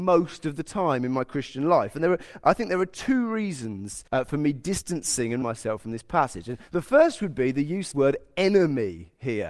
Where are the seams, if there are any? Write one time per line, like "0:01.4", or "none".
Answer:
0:04.1
0:05.4
0:06.7
0:07.9